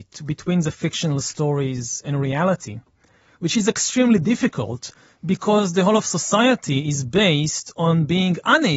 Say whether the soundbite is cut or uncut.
uncut